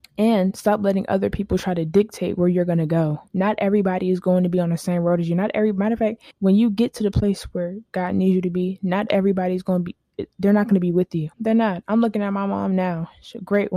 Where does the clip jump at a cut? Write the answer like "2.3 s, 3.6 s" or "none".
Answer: 3.3 s, 6.3 s, 11.3 s